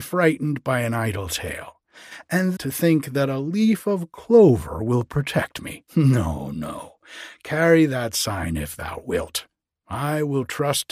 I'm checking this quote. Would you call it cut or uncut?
cut